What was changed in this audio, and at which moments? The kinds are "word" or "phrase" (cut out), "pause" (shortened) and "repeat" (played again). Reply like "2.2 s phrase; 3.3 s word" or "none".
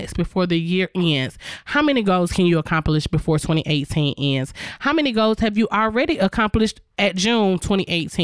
none